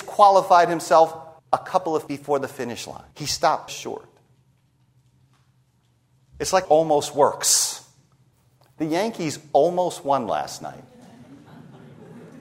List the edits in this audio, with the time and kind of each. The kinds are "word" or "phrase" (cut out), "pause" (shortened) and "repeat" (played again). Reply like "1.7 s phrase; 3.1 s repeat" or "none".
1.4 s pause; 2.1 s word; 3.1 s pause; 3.7 s word; 6.6 s phrase; 8.3 s pause